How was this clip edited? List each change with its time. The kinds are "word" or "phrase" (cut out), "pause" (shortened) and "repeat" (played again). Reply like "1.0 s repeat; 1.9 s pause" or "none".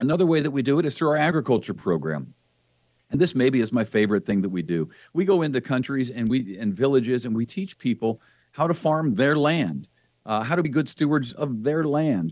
none